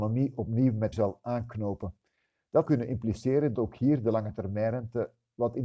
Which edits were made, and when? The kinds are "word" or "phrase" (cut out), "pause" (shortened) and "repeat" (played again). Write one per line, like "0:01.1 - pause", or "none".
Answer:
0:00.9 - word
0:02.7 - word
0:03.6 - word

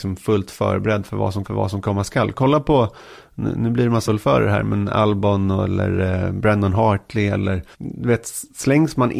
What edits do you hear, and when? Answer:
0:01.4 - repeat
0:04.1 - word
0:07.7 - pause

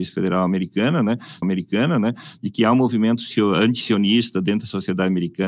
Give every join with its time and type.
0:01.4 - repeat

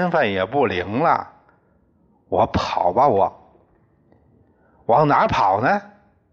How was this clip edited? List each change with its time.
none

